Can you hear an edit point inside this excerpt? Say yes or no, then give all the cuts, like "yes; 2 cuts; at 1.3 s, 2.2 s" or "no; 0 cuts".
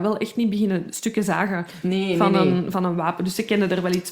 no; 0 cuts